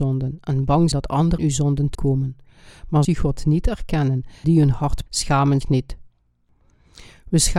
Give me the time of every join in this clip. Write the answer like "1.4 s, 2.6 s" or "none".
0.9 s, 1.4 s, 1.9 s, 3.0 s, 4.4 s, 5.1 s, 5.6 s

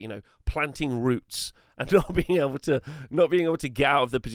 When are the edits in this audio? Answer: none

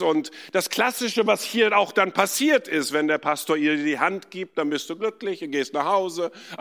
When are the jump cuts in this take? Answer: none

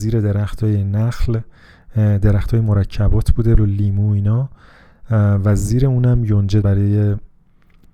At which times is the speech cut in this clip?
3.6 s, 6.6 s

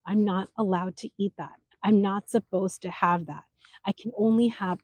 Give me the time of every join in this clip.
none

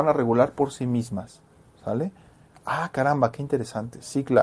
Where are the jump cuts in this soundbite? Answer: none

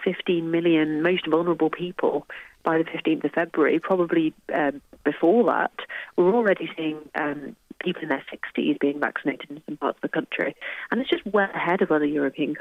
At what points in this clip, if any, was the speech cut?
none

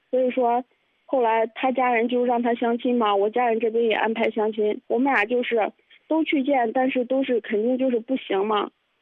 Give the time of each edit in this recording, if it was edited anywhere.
4.8 s

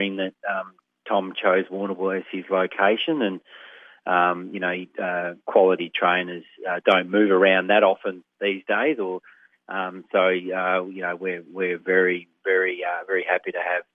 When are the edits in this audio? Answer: none

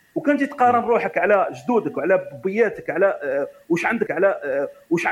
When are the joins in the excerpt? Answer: 4.1 s

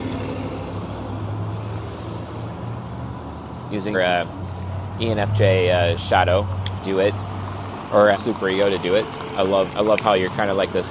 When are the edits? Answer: 3.9 s, 6.8 s, 8.1 s, 9.7 s

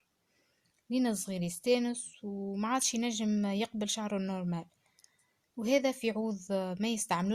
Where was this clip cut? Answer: none

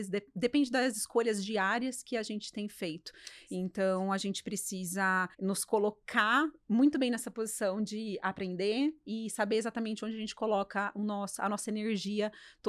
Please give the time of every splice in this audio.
5.3 s

